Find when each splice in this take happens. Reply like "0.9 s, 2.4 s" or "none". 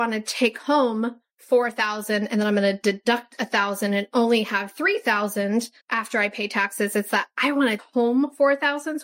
1.3 s, 5.8 s, 7.8 s